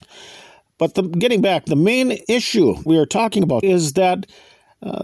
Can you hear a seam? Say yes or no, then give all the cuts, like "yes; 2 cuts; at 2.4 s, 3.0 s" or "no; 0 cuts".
yes; 2 cuts; at 2.9 s, 3.6 s